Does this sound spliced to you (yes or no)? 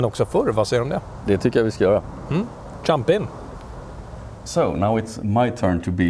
no